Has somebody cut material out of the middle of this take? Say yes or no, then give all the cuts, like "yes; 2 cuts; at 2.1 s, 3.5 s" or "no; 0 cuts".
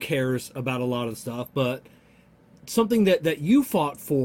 no; 0 cuts